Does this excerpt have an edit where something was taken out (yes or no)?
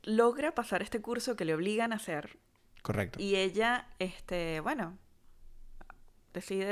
no